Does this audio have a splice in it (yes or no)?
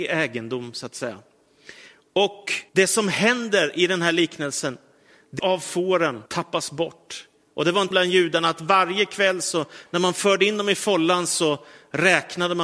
yes